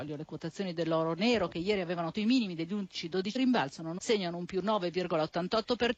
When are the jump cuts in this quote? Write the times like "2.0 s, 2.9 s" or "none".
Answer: 2.1 s, 3.4 s, 4.0 s